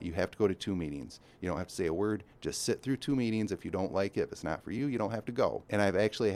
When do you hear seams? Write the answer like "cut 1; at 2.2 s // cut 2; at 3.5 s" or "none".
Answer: none